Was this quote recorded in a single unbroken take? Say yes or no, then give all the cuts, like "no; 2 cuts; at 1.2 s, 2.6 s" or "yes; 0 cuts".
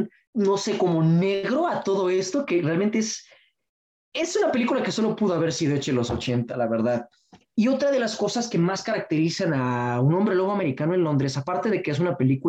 yes; 0 cuts